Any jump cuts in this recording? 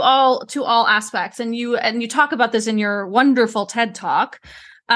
no; 0 cuts

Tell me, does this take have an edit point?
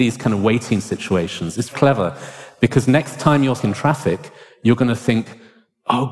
yes; 2 cuts; at 1.7 s, 3.6 s

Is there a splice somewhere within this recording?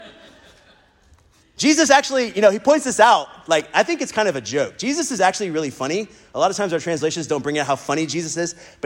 no; 0 cuts

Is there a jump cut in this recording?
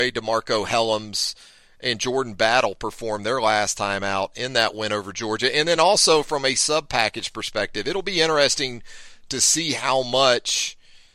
no; 0 cuts

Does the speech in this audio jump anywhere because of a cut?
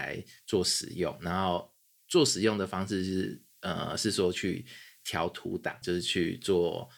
yes; 1 cut; at 5.8 s

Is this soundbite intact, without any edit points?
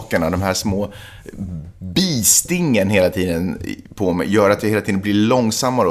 yes; 0 cuts

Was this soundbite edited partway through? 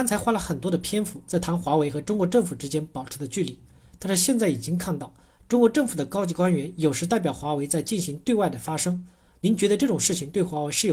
no; 0 cuts

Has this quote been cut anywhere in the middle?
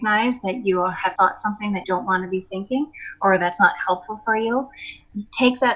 yes; 2 cuts; at 1.2 s, 1.8 s

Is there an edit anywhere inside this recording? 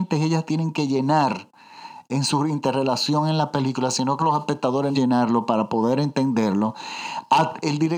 yes; 2 cuts; at 4.2 s, 4.9 s

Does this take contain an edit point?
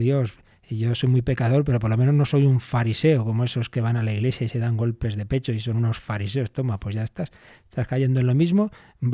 no; 0 cuts

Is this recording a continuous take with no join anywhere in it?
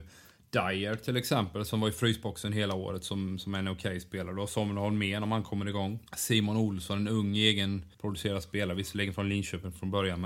no; 2 cuts; at 6.1 s, 7.9 s

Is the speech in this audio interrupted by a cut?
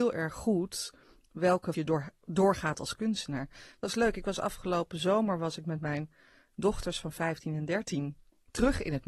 yes; 1 cut; at 1.7 s

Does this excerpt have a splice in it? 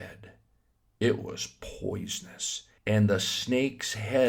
yes; 1 cut; at 2.8 s

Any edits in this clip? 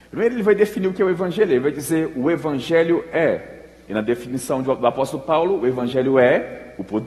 no; 0 cuts

